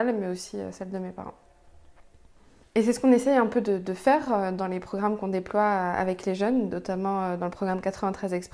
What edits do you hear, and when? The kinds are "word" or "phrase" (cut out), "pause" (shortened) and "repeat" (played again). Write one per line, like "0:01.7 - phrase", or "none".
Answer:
none